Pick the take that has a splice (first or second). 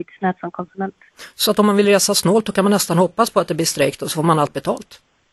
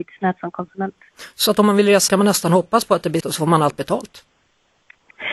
second